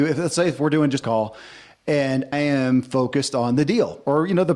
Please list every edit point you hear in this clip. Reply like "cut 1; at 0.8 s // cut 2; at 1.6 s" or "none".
cut 1; at 1.0 s // cut 2; at 2.3 s